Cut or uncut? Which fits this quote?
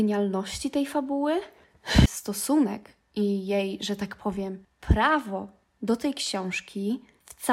uncut